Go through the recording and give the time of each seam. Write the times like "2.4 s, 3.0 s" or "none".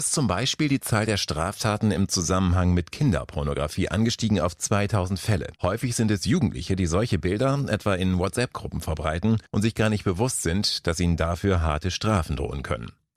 5.6 s, 9.5 s